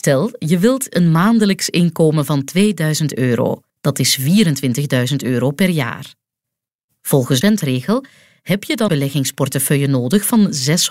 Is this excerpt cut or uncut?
cut